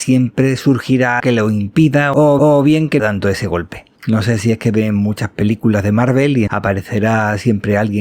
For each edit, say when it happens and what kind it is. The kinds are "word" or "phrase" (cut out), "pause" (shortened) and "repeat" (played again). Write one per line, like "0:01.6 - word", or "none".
0:01.2 - word
0:02.4 - repeat
0:03.0 - phrase
0:04.0 - pause
0:06.5 - word